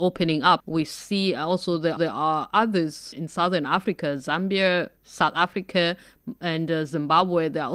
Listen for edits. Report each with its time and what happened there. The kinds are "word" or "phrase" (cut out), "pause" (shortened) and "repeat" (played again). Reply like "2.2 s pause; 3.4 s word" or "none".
2.0 s repeat; 3.1 s word; 5.0 s pause